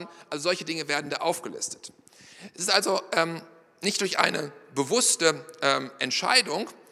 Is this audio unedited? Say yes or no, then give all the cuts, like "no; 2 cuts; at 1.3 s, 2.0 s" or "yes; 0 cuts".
yes; 0 cuts